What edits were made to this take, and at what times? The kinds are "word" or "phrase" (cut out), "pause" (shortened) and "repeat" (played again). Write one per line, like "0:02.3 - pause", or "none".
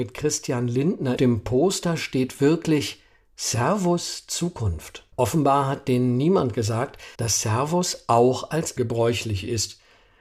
0:01.2 - phrase
0:05.1 - pause
0:07.1 - pause
0:08.8 - word